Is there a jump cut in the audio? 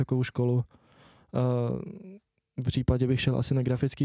yes; 1 cut; at 2.7 s

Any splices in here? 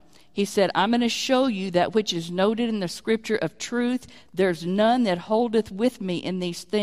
no; 0 cuts

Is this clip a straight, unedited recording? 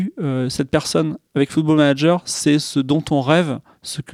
yes; 0 cuts

